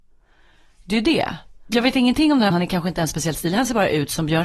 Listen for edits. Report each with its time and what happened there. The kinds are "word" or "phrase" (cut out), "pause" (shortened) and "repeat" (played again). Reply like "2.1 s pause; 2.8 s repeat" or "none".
2.5 s word